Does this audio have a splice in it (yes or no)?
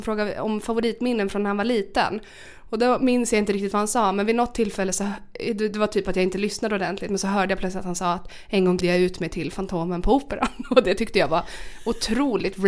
yes